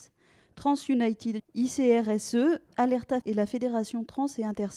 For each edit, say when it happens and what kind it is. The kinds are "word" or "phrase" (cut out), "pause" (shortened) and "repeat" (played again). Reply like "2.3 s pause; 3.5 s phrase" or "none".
1.4 s word; 3.2 s word